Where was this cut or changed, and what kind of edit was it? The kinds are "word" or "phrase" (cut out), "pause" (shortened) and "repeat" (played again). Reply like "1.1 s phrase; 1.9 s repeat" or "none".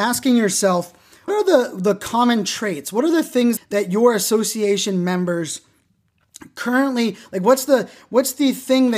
1.3 s word; 3.6 s word